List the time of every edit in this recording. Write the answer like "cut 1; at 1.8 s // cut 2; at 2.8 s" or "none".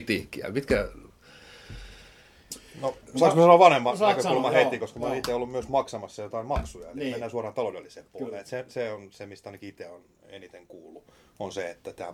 none